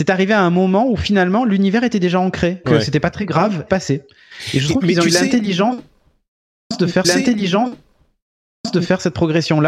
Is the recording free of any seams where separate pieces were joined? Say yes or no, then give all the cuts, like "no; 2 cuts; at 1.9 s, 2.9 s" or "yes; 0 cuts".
no; 3 cuts; at 2.6 s, 3.7 s, 7.0 s